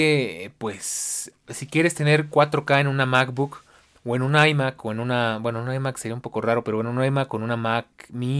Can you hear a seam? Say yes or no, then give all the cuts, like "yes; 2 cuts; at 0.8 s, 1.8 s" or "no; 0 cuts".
no; 0 cuts